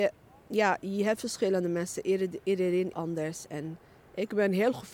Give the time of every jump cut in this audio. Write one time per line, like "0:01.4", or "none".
0:02.9